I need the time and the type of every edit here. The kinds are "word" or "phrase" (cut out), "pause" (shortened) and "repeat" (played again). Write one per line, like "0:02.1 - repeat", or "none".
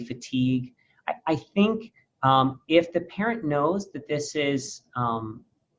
none